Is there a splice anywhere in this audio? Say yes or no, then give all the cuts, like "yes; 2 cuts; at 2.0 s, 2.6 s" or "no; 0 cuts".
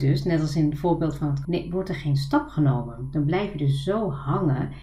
yes; 1 cut; at 1.4 s